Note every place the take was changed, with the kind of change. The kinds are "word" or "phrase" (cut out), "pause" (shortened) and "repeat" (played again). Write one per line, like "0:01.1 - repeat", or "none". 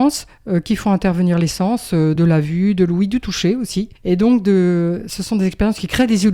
0:02.2 - word
0:04.0 - pause